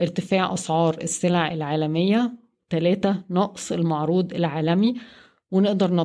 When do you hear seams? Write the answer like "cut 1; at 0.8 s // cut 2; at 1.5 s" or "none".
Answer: none

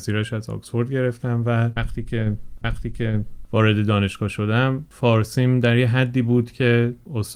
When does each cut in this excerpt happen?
cut 1; at 2.6 s

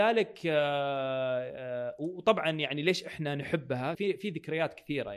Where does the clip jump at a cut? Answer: cut 1; at 3.9 s

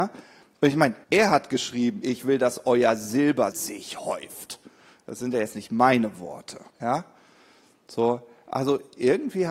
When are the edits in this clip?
cut 1; at 1.0 s // cut 2; at 3.5 s // cut 3; at 6.7 s

